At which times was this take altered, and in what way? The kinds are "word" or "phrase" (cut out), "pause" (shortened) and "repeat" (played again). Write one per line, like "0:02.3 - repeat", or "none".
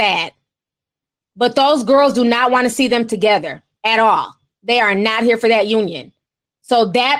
none